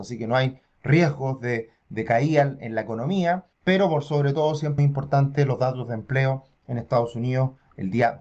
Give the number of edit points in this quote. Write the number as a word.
one